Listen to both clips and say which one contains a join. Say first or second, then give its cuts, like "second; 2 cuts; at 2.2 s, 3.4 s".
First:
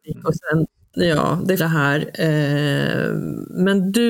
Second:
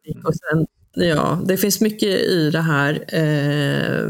first; 1 cut; at 1.6 s